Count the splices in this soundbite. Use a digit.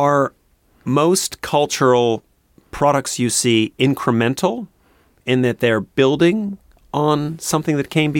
0